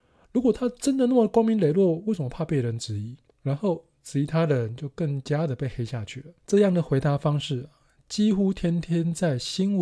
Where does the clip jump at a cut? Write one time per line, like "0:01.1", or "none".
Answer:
0:03.3
0:06.4